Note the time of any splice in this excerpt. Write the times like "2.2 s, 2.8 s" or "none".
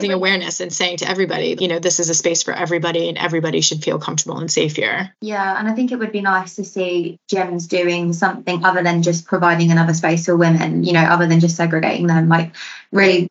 1.6 s